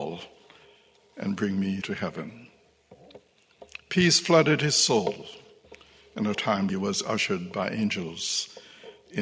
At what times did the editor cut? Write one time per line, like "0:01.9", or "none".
0:01.8
0:06.3
0:06.7